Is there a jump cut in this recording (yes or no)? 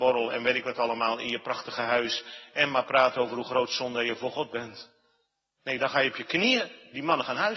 no